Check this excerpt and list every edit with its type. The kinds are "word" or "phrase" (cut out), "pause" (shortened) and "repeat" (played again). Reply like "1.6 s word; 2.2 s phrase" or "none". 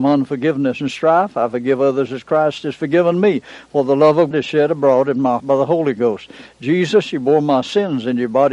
4.3 s word; 5.4 s word

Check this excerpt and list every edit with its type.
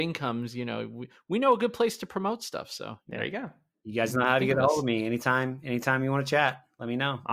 none

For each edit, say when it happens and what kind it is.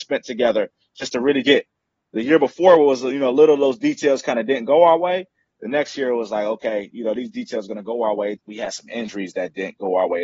1.4 s word; 8.4 s word

